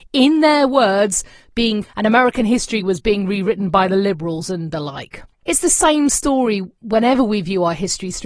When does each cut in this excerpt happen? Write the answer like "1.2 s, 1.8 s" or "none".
1.8 s, 5.3 s